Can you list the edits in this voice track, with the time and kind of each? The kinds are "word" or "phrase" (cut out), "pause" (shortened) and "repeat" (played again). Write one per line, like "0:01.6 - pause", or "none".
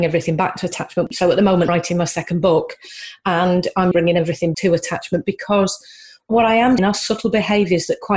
0:01.7 - word
0:03.9 - word
0:04.5 - word
0:06.8 - word